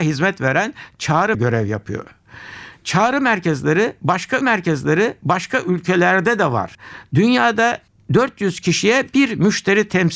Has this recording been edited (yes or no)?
yes